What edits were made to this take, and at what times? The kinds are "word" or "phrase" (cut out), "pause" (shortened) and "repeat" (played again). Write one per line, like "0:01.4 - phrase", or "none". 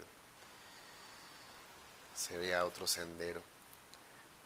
none